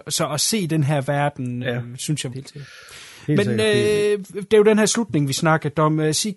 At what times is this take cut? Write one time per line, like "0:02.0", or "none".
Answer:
0:01.6
0:02.3